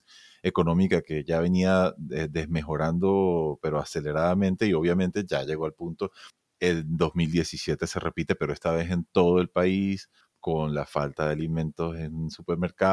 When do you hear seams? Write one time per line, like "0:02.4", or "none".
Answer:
none